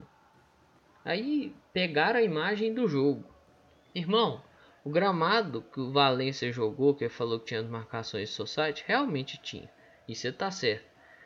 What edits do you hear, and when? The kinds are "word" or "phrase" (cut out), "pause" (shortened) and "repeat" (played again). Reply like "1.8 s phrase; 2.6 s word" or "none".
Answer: none